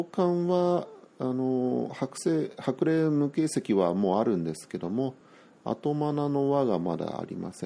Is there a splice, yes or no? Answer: no